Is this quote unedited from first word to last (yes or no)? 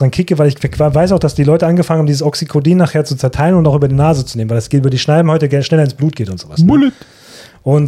yes